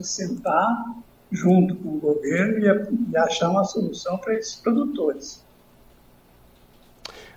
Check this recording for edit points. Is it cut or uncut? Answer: uncut